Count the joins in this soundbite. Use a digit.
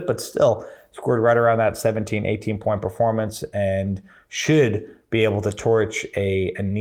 0